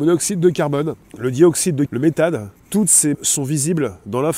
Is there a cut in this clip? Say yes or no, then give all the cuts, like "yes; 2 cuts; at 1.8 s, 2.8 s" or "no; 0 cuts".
yes; 4 cuts; at 1.0 s, 1.9 s, 2.6 s, 3.1 s